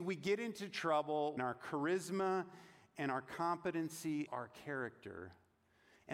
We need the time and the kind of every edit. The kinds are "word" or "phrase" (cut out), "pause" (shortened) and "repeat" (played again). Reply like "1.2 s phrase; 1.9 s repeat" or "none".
1.4 s word; 4.3 s word

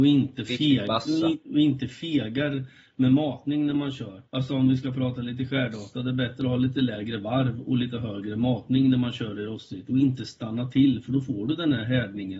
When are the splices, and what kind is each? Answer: none

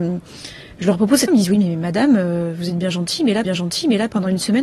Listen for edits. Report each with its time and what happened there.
1.3 s word; 3.4 s repeat

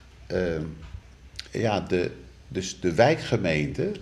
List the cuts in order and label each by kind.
1.5 s pause

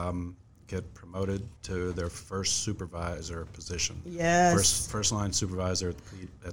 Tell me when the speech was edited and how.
1.6 s pause

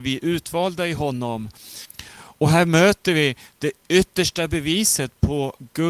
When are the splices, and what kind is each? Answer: none

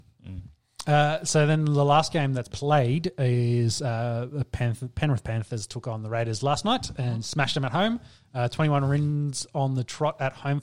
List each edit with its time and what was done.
2.5 s word

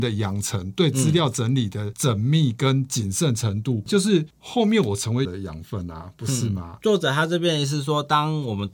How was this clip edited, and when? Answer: 4.3 s pause; 5.2 s word

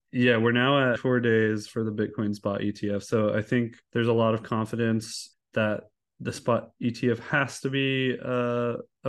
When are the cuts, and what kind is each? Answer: 1.0 s phrase; 3.8 s pause; 5.3 s word

